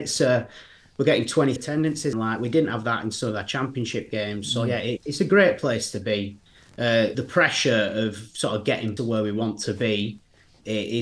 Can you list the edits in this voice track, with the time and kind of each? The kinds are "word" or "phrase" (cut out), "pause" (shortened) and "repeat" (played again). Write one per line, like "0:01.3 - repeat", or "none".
0:01.6 - word
0:02.1 - phrase
0:05.0 - word
0:07.1 - word
0:09.0 - phrase